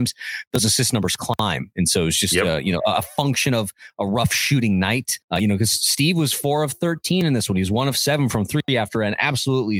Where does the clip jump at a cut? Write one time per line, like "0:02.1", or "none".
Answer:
0:05.2

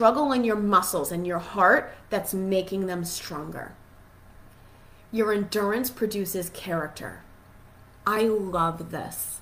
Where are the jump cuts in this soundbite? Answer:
none

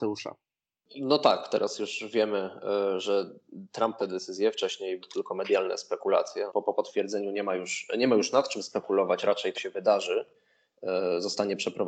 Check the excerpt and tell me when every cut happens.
0:04.0
0:05.0
0:06.5
0:09.5

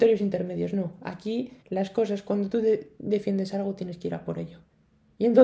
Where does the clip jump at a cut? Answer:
0:01.6

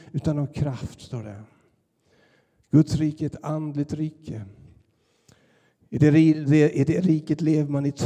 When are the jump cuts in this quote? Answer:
none

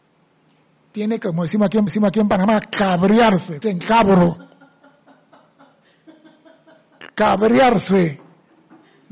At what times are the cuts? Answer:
0:01.9
0:03.6

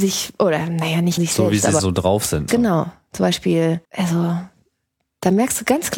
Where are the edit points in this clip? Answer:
0:01.2
0:01.8
0:02.5
0:03.8

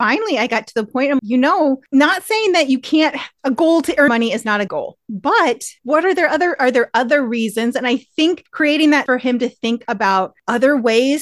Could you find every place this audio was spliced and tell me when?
0:01.2
0:04.1
0:04.7
0:09.1

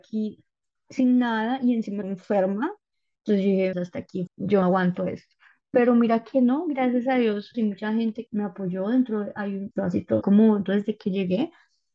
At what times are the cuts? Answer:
0:02.0
0:03.7
0:04.3
0:04.6
0:07.5
0:08.3
0:09.7
0:10.2
0:10.7

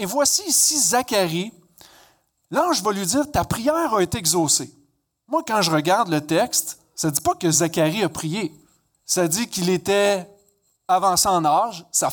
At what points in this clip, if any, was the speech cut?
none

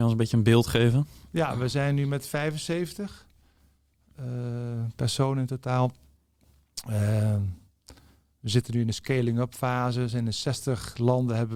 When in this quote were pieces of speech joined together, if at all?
none

